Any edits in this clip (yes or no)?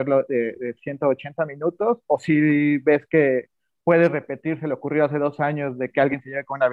no